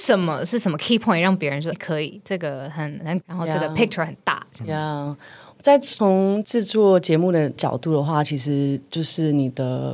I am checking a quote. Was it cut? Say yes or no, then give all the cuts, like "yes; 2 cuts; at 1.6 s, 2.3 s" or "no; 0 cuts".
yes; 2 cuts; at 1.7 s, 3.2 s